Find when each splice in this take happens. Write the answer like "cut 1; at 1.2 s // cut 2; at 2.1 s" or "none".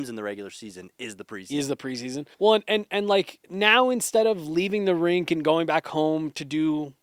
cut 1; at 2.3 s // cut 2; at 3.4 s

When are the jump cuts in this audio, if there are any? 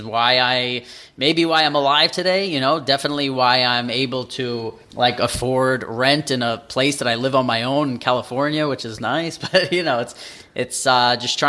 cut 1; at 4.8 s

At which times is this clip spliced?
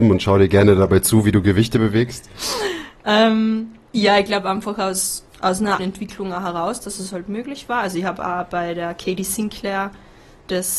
cut 1; at 5.3 s // cut 2; at 5.8 s

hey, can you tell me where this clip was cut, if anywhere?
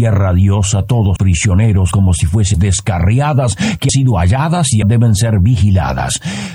cut 1; at 1.2 s // cut 2; at 1.9 s // cut 3; at 2.5 s // cut 4; at 3.9 s // cut 5; at 4.8 s

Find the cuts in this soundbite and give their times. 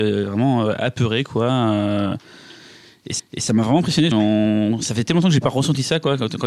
cut 1; at 3.2 s // cut 2; at 4.1 s

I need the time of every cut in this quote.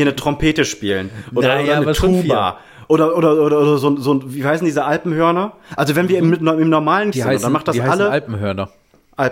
cut 1; at 7.1 s

